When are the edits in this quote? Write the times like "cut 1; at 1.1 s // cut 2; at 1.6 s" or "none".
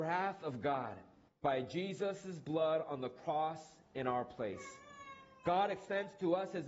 cut 1; at 1.3 s